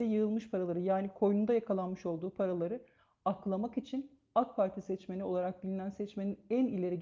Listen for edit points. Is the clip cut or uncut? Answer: uncut